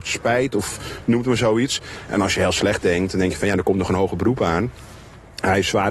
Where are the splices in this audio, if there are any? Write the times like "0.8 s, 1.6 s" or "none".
none